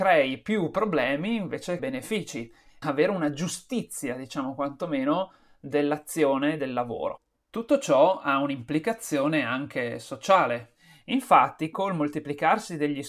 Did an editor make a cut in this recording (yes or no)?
yes